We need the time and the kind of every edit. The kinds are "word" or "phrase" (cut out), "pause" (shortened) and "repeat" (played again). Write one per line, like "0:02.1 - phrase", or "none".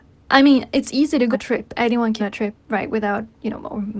0:01.3 - word
0:02.2 - phrase
0:02.6 - pause